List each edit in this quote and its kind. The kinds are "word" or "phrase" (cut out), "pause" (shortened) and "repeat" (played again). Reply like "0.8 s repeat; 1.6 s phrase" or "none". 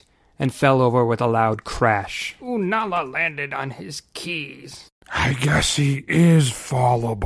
none